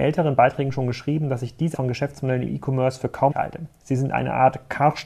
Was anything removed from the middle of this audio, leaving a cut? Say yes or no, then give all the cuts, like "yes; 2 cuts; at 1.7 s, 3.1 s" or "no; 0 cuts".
yes; 2 cuts; at 1.7 s, 3.3 s